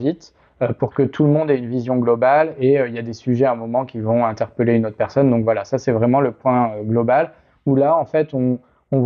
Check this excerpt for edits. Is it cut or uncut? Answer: uncut